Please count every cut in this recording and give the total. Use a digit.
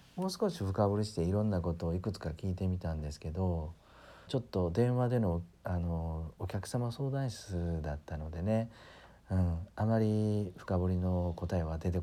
1